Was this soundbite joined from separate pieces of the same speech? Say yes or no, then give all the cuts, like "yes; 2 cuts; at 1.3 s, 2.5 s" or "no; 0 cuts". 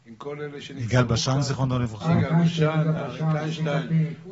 no; 0 cuts